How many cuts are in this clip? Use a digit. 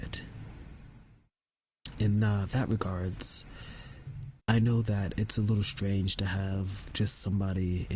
1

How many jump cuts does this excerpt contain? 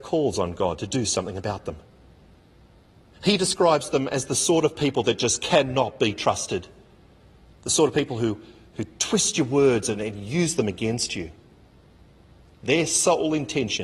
0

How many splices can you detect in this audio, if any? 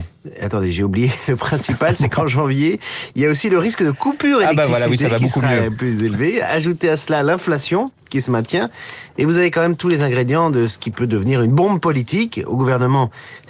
0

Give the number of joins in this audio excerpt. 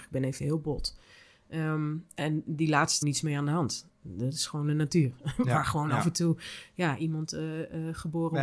1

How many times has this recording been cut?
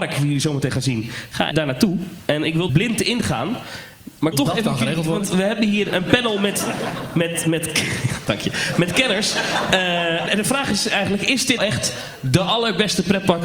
6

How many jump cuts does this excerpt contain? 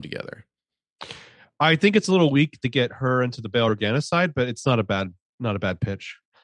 0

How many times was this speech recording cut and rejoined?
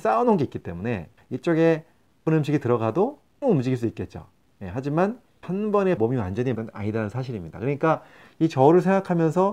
6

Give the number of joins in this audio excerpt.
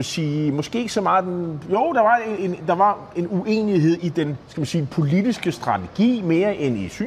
3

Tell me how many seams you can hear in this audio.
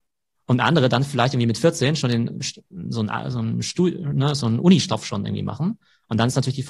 0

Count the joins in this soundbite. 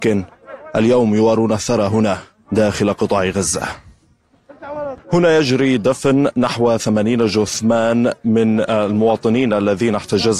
2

